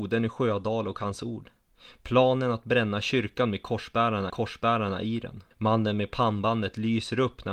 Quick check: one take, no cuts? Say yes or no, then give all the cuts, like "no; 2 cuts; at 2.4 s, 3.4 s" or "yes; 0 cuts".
no; 2 cuts; at 4.3 s, 5.5 s